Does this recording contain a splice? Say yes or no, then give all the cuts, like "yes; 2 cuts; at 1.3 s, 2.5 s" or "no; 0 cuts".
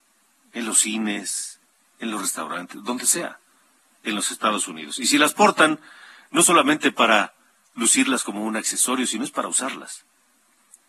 no; 0 cuts